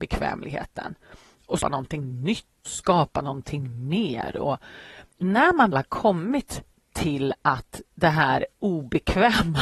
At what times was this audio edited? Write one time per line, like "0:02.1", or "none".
0:01.6
0:02.7
0:05.1
0:05.7
0:07.9
0:08.6